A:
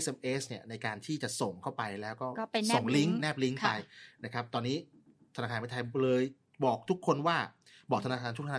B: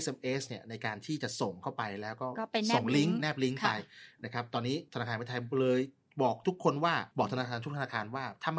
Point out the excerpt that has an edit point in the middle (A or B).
B